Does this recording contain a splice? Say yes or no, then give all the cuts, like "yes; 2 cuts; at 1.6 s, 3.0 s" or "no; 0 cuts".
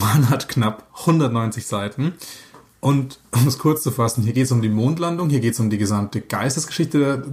no; 0 cuts